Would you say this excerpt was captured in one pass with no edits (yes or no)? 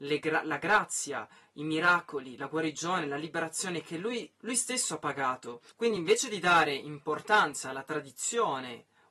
yes